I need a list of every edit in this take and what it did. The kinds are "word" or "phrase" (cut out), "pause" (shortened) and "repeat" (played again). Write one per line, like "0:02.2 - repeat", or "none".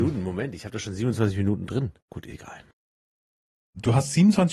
0:02.0 - pause